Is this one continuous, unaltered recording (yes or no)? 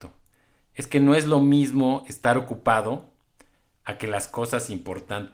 yes